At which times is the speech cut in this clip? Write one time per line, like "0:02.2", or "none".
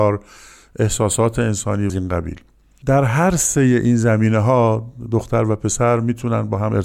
0:01.9